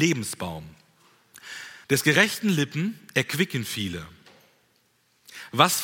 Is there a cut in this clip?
yes; 1 cut; at 1.8 s

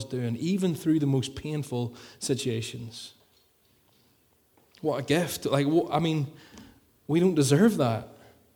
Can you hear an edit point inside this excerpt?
no; 0 cuts

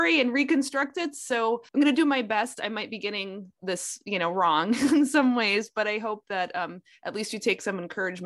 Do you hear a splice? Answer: yes; 1 cut; at 1.7 s

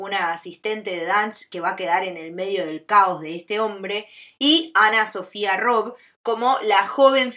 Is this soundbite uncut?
yes; 0 cuts

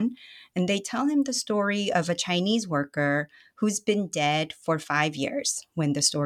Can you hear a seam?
no; 0 cuts

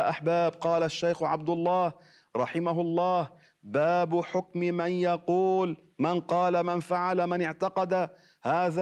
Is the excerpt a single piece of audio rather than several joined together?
yes; 0 cuts

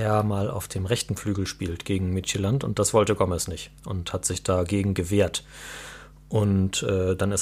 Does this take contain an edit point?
yes; 1 cut; at 3.8 s

